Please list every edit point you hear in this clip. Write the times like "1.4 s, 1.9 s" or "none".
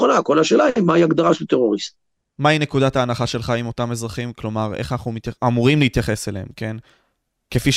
none